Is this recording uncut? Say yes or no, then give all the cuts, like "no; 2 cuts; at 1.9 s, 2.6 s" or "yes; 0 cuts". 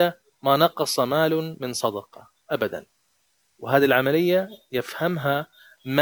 yes; 0 cuts